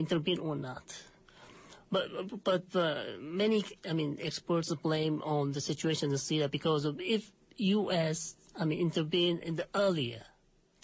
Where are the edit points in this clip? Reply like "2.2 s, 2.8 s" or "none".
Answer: none

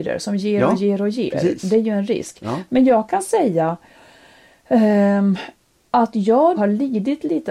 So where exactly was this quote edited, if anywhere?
6.5 s

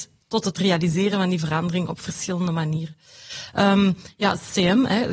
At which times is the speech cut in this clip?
none

